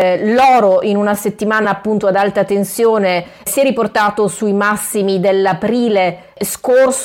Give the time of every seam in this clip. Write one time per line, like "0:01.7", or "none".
none